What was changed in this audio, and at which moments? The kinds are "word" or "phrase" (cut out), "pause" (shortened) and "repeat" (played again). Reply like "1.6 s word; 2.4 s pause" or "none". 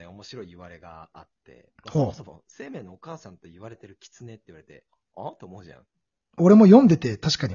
none